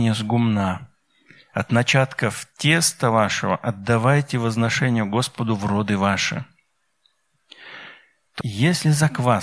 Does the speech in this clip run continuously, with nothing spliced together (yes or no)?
no